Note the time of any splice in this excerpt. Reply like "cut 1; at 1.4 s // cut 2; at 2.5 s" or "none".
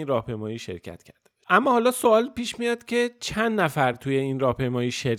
none

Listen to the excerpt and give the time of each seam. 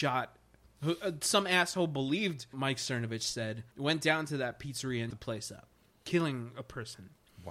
cut 1; at 2.5 s // cut 2; at 3.7 s // cut 3; at 5.1 s

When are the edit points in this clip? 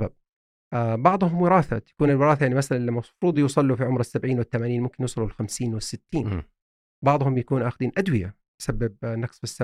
none

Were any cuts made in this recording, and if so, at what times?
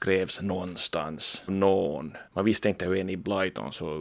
cut 1; at 1.5 s // cut 2; at 2.3 s

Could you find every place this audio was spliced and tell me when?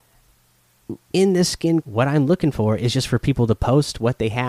cut 1; at 1.8 s

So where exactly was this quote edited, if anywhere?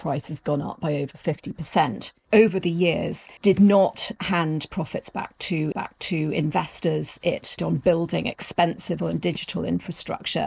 cut 1; at 3.4 s // cut 2; at 5.7 s // cut 3; at 7.6 s // cut 4; at 9.0 s

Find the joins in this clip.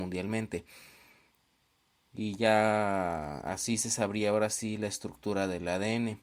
none

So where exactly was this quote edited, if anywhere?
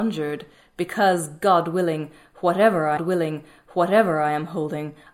cut 1; at 3.0 s

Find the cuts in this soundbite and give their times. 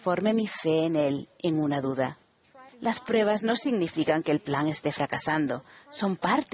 cut 1; at 2.7 s

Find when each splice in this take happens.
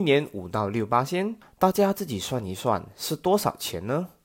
cut 1; at 1.4 s

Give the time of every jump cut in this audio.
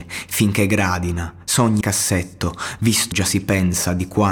cut 1; at 1.8 s // cut 2; at 3.1 s

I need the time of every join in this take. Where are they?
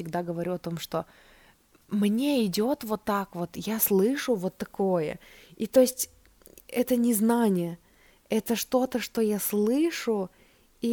none

